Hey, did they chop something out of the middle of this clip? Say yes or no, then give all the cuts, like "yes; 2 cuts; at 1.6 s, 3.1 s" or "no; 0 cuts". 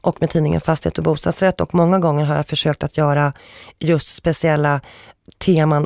no; 0 cuts